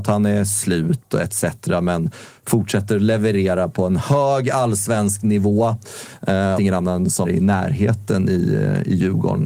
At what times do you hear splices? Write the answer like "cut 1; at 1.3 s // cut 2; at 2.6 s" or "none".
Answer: cut 1; at 6.6 s // cut 2; at 7.2 s